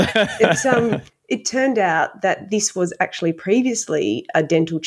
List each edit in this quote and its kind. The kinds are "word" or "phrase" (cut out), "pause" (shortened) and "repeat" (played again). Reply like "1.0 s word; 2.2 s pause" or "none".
1.1 s pause